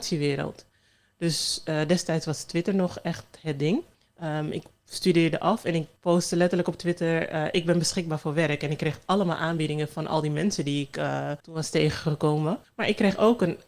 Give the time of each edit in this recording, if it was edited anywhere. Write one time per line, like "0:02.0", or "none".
0:03.9
0:06.0
0:11.4
0:12.6